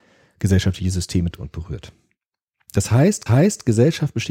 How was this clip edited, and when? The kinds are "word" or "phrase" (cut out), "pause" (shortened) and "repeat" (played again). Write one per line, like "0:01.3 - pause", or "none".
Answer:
0:01.3 - word
0:03.3 - repeat